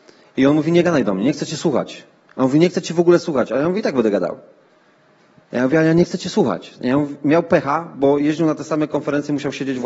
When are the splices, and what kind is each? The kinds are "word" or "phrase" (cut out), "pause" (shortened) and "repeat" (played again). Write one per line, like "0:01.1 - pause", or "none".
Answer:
none